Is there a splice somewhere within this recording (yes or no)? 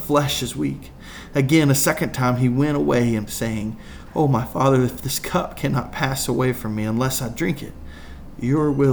yes